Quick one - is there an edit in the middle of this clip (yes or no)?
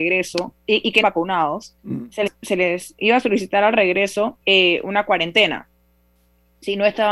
yes